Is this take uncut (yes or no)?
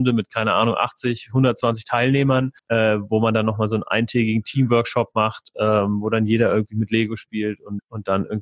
no